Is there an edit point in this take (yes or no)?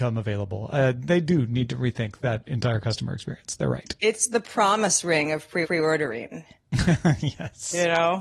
yes